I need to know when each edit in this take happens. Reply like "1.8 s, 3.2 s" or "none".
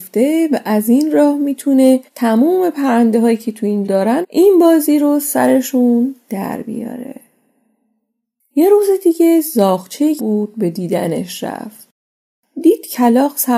2.1 s, 3.8 s, 4.2 s, 10.2 s